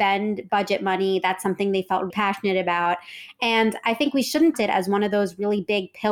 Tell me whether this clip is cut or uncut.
cut